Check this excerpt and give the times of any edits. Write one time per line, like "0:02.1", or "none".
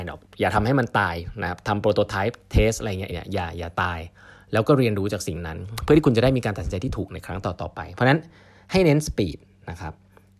0:03.1